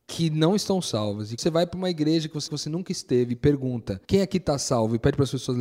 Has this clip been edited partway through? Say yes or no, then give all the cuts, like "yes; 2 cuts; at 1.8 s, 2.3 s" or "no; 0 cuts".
yes; 3 cuts; at 1.4 s, 2.5 s, 4.0 s